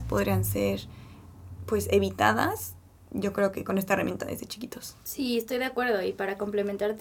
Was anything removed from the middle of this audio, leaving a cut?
no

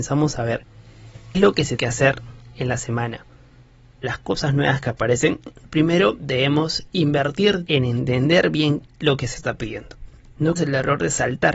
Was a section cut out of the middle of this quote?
yes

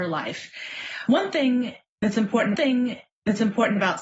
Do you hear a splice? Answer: yes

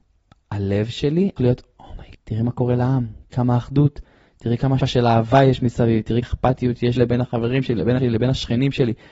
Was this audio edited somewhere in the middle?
yes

